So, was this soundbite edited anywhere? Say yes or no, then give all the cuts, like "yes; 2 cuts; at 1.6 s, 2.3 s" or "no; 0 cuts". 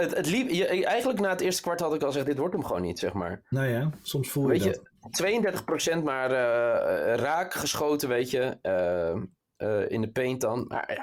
no; 0 cuts